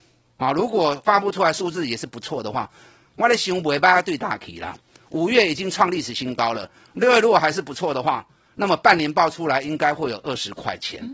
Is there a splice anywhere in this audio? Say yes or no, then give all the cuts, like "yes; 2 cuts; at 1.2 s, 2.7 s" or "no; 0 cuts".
no; 0 cuts